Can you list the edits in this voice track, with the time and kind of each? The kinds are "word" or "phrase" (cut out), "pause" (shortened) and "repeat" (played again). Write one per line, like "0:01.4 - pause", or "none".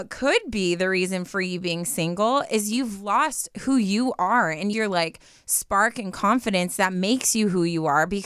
0:04.7 - phrase